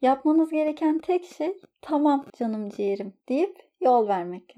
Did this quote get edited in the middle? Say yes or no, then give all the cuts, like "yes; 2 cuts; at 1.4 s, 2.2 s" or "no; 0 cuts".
yes; 1 cut; at 3.2 s